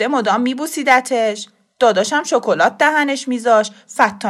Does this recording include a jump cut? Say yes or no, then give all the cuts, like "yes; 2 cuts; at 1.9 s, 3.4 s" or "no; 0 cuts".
no; 0 cuts